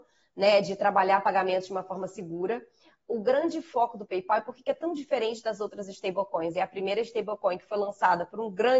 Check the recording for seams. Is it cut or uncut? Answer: uncut